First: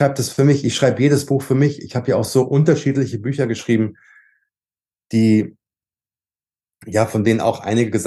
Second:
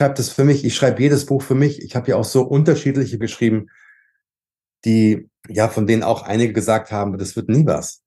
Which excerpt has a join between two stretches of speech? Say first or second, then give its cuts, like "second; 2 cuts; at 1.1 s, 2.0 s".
second; 2 cuts; at 3.2 s, 5.4 s